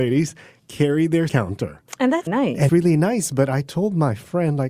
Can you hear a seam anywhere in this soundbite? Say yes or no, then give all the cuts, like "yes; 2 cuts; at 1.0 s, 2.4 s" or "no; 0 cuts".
yes; 3 cuts; at 1.3 s, 2.3 s, 2.7 s